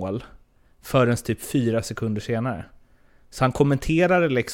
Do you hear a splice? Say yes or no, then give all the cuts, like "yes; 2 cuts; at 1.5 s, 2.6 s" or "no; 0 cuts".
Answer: no; 0 cuts